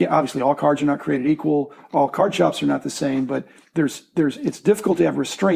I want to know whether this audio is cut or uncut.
uncut